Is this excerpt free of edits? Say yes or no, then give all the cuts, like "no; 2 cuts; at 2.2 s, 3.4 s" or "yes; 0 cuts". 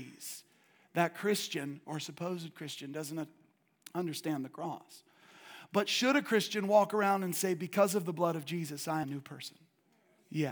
no; 1 cut; at 9.0 s